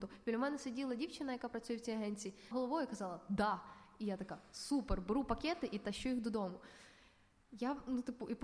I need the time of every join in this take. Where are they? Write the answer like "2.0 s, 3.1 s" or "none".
2.5 s